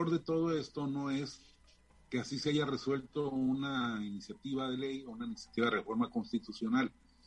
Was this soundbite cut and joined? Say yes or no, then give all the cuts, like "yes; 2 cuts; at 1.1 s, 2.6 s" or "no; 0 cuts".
no; 0 cuts